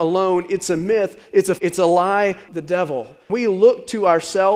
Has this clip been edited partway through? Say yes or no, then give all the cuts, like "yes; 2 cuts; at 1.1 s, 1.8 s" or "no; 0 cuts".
yes; 3 cuts; at 1.6 s, 2.5 s, 3.3 s